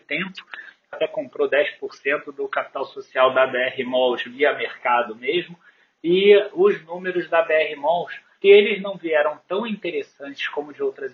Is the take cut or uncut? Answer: cut